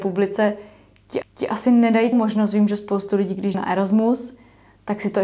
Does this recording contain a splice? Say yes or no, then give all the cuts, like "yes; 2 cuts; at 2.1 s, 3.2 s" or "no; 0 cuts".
yes; 3 cuts; at 1.2 s, 2.1 s, 3.5 s